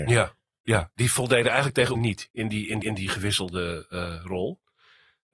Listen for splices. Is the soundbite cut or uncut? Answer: cut